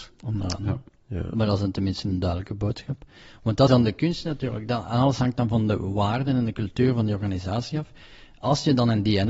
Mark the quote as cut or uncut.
cut